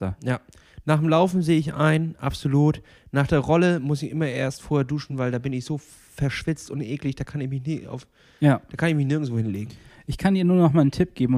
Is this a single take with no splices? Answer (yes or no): yes